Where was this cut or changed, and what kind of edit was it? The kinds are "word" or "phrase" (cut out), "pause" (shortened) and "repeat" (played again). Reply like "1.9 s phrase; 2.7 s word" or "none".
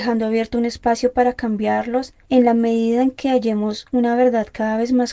2.2 s pause